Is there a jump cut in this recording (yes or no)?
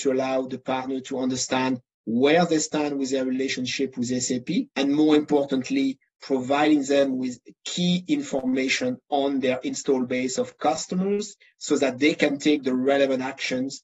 yes